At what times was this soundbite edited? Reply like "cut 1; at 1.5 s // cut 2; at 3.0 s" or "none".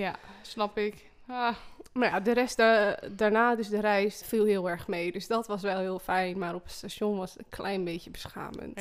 cut 1; at 4.2 s